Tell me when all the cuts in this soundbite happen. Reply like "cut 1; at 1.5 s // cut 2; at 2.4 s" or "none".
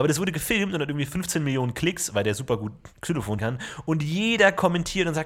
cut 1; at 3.4 s